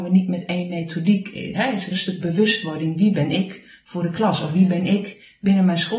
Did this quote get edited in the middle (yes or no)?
yes